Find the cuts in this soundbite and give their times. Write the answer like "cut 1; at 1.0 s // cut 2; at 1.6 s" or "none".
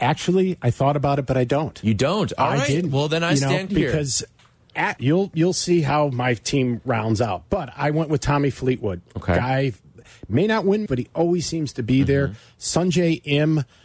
cut 1; at 3.7 s // cut 2; at 5.0 s // cut 3; at 10.9 s